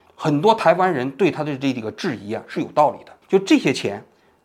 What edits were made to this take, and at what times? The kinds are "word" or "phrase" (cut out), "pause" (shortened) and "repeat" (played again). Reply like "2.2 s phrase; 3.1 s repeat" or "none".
3.2 s pause